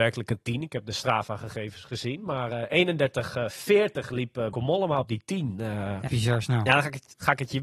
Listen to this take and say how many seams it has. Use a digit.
2